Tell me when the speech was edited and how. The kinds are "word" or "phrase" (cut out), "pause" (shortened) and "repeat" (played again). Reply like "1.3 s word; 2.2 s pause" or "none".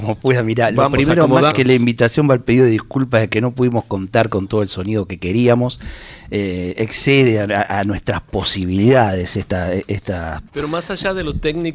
1.5 s word; 10.5 s pause